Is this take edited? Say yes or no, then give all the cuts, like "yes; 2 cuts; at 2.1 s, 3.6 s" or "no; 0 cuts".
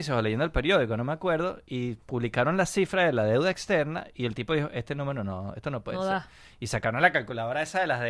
no; 0 cuts